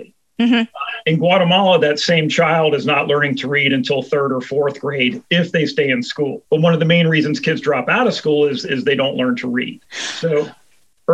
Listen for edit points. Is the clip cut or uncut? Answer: cut